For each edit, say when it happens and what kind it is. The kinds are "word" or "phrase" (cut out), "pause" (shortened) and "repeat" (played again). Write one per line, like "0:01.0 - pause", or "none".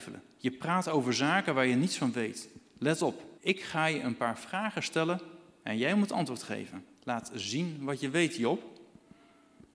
0:03.4 - pause
0:06.9 - pause